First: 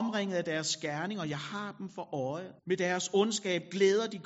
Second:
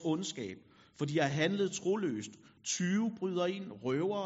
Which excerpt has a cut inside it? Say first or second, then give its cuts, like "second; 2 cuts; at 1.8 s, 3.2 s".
first; 1 cut; at 2.6 s